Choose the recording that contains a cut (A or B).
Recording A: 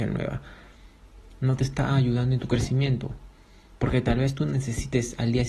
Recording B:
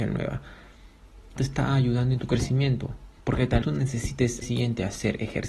B